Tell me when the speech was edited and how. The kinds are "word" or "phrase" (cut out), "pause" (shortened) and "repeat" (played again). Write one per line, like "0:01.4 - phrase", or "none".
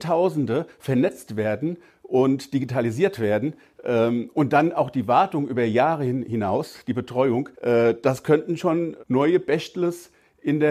0:07.5 - pause